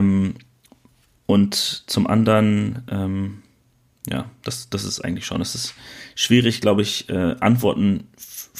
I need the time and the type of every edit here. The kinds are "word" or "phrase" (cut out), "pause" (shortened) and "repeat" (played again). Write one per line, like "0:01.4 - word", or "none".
none